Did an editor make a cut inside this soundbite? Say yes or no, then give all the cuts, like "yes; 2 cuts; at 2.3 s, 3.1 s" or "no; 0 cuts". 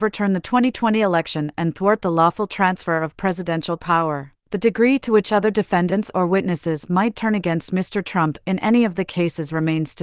yes; 1 cut; at 4.4 s